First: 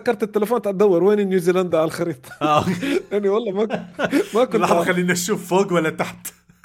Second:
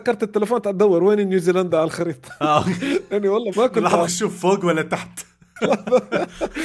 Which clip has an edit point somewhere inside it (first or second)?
second